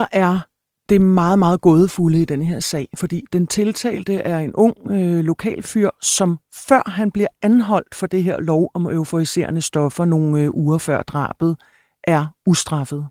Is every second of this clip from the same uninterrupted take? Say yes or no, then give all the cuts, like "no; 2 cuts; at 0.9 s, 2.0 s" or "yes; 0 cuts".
yes; 0 cuts